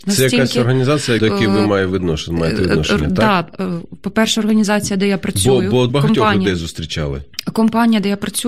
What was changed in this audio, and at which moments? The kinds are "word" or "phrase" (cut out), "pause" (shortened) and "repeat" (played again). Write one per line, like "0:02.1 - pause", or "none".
0:01.2 - word
0:05.9 - word

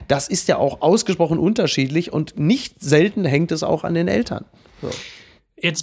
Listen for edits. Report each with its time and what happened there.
none

